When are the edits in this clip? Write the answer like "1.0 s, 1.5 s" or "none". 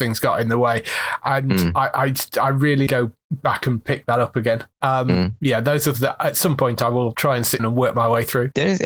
2.9 s, 5.9 s, 7.6 s